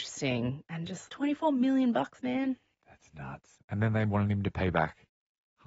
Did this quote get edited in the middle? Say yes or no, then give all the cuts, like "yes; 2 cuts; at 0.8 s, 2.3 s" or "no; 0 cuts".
yes; 1 cut; at 1.1 s